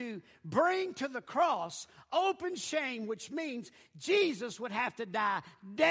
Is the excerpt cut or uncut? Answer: uncut